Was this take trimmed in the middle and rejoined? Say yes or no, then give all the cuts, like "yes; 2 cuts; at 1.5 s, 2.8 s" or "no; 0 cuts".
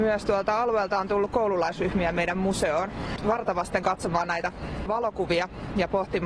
no; 0 cuts